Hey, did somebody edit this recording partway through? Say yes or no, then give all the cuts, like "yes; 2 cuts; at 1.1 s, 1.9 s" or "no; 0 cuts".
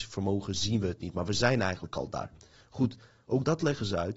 no; 0 cuts